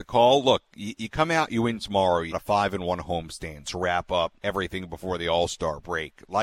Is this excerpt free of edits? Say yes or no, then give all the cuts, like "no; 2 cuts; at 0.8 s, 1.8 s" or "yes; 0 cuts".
no; 2 cuts; at 2.3 s, 4.4 s